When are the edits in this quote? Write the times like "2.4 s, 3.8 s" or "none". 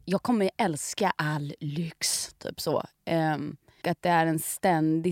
3.8 s

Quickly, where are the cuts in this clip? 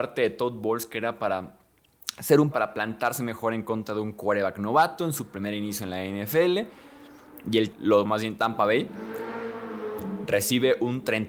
2.5 s, 7.7 s, 8.1 s

